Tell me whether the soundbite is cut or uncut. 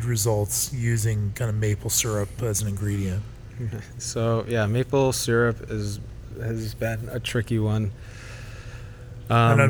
uncut